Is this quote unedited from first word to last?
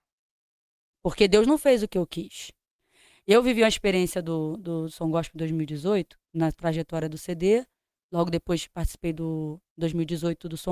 yes; 0 cuts

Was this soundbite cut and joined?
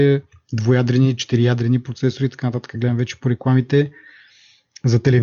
no; 0 cuts

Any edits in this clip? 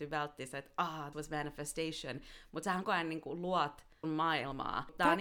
yes; 3 cuts; at 1.1 s, 2.8 s, 4.0 s

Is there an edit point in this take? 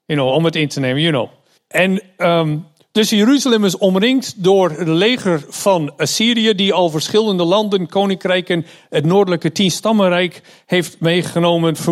yes; 1 cut; at 1.6 s

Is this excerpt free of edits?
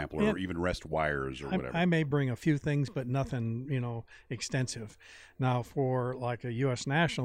yes; 0 cuts

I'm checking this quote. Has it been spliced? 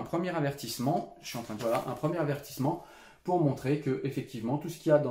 yes; 1 cut; at 1.6 s

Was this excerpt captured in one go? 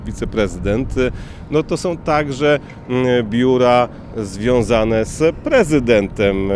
yes; 0 cuts

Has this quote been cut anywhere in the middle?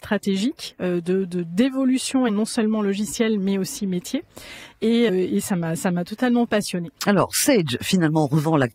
yes; 3 cuts; at 2.3 s, 5.1 s, 7.0 s

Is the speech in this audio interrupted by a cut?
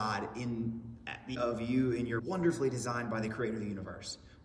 yes; 2 cuts; at 1.3 s, 2.2 s

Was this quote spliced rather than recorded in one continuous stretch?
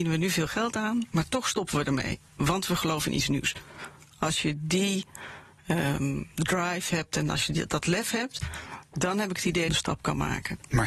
yes; 1 cut; at 9.7 s

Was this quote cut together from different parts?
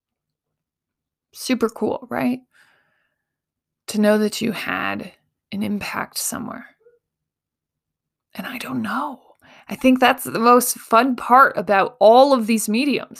no; 0 cuts

